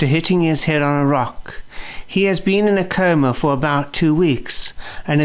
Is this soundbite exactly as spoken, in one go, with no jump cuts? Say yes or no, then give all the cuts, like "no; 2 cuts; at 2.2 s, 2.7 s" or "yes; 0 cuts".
yes; 0 cuts